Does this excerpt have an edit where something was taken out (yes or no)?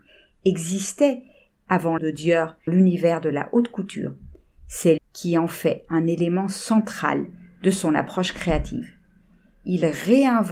yes